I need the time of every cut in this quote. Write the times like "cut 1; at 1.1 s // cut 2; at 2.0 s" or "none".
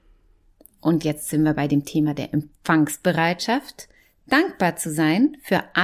none